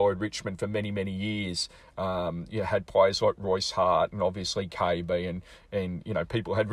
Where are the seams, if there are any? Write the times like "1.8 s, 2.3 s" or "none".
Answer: none